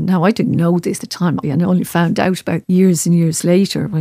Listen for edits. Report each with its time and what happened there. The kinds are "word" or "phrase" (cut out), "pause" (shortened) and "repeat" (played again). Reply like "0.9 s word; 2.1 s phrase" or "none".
1.0 s word; 1.4 s word; 2.6 s word